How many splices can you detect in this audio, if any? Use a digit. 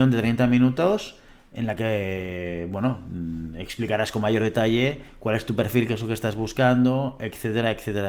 0